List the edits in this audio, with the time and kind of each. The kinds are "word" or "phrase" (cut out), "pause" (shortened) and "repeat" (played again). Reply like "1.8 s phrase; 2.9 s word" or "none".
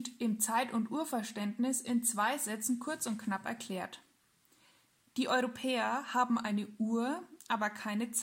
none